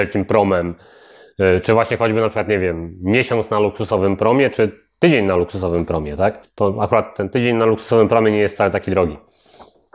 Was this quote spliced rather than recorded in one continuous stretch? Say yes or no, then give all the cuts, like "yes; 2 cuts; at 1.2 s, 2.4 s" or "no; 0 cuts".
yes; 1 cut; at 6.4 s